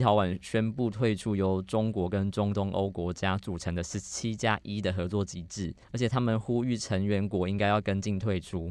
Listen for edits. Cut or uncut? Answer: cut